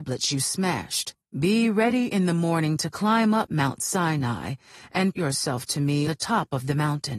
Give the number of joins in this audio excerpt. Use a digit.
3